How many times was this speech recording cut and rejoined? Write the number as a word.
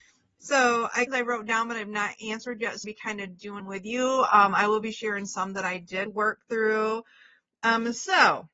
four